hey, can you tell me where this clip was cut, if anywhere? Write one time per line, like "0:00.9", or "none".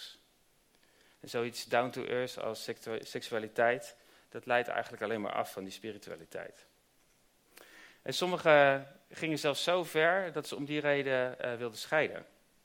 none